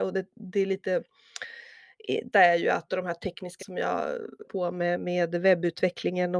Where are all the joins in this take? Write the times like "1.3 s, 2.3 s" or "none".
2.3 s, 2.9 s, 3.6 s, 4.4 s